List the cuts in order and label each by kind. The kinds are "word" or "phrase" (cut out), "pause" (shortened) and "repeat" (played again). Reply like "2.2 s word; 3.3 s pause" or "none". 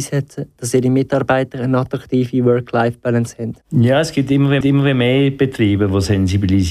3.6 s pause; 4.6 s repeat